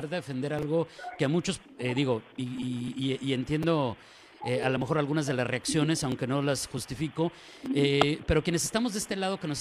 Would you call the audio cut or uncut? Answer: uncut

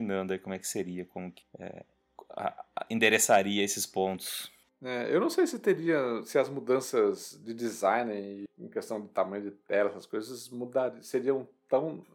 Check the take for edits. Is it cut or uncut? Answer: uncut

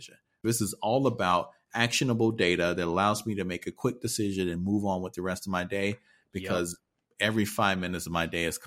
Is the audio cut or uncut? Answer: uncut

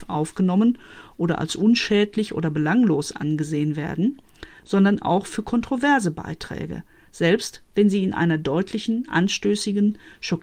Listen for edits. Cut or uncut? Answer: uncut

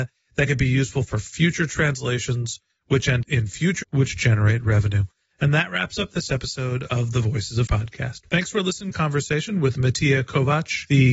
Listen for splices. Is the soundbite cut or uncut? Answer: cut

